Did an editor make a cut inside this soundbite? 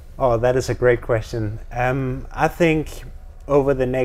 no; 0 cuts

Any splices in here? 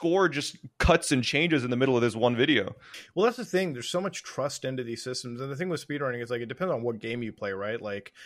no; 0 cuts

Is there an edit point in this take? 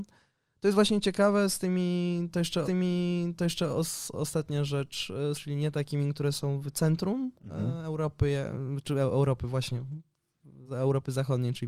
yes; 4 cuts; at 2.6 s, 5.4 s, 7.4 s, 10.7 s

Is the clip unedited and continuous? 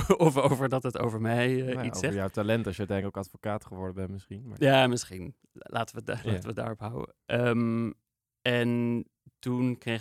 yes; 0 cuts

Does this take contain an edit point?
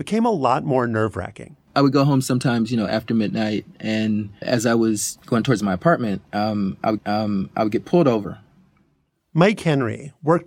yes; 3 cuts; at 1.7 s, 4.4 s, 7.0 s

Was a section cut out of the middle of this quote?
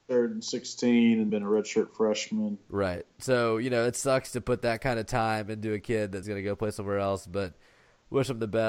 yes; 2 cuts; at 1.3 s, 6.2 s

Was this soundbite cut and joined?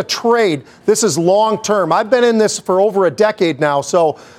no; 0 cuts

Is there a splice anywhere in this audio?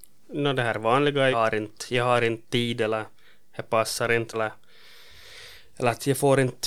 yes; 2 cuts; at 1.3 s, 4.3 s

